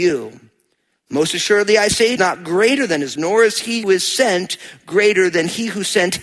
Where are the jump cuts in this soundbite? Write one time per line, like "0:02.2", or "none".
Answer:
0:02.2
0:03.2
0:03.8